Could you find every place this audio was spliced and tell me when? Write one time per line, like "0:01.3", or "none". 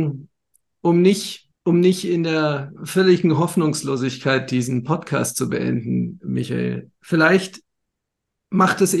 0:01.6
0:06.2